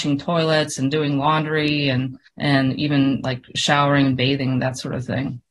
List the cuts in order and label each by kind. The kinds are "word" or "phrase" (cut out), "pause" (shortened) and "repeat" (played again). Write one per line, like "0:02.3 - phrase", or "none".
0:02.3 - pause